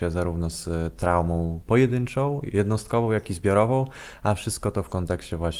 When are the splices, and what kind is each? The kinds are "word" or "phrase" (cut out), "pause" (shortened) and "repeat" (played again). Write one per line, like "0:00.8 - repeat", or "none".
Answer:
none